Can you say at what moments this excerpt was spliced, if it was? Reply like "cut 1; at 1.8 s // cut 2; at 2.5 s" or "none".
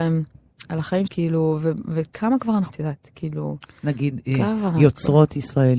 cut 1; at 1.1 s // cut 2; at 2.7 s